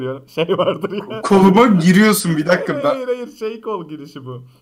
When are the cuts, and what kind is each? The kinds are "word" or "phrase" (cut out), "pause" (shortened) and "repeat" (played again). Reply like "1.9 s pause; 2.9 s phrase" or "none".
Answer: none

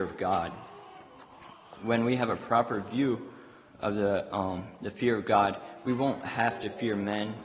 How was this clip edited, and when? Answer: none

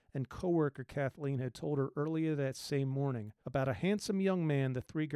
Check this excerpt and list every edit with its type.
3.4 s pause

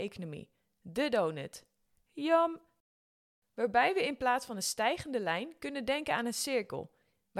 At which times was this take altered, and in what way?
none

